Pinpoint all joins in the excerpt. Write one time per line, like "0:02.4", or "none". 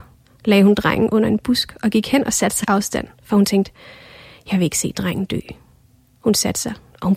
0:02.6